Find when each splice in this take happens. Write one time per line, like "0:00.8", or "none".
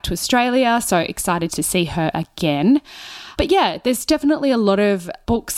none